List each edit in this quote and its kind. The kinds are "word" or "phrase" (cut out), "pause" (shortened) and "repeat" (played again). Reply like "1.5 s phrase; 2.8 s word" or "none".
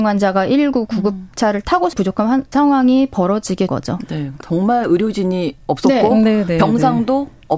1.9 s phrase; 2.5 s word; 3.7 s word; 4.4 s phrase